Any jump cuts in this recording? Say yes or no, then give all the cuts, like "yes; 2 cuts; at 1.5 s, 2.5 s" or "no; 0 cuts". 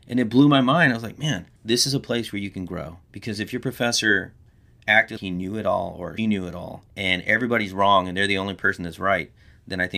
yes; 5 cuts; at 1.6 s, 3.0 s, 5.2 s, 6.2 s, 6.9 s